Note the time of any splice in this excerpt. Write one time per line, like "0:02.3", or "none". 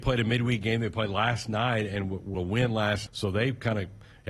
0:02.3
0:03.1